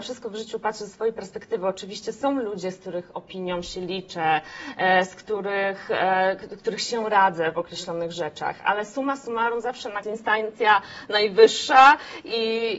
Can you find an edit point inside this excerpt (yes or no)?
yes